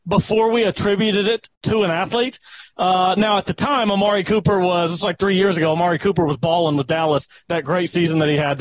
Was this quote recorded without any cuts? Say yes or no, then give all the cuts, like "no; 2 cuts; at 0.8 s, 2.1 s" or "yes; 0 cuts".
yes; 0 cuts